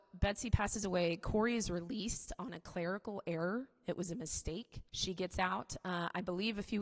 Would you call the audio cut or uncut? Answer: cut